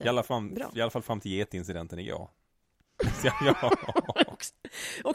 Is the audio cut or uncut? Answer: uncut